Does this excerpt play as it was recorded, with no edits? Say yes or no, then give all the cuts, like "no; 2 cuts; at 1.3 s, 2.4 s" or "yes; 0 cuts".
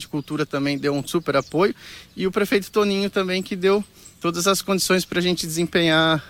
yes; 0 cuts